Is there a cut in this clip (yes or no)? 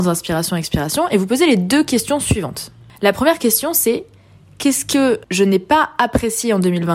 no